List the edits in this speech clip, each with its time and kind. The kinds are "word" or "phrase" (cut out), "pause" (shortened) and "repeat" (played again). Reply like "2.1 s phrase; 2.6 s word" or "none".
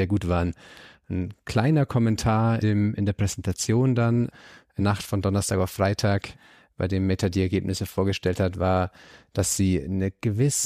2.6 s word; 4.8 s word